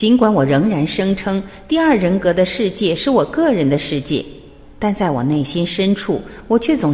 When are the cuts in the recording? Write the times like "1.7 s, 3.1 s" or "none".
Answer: none